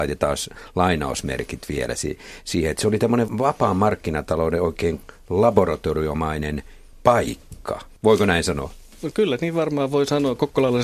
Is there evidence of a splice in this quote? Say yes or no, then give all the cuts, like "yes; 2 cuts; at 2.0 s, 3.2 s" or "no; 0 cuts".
no; 0 cuts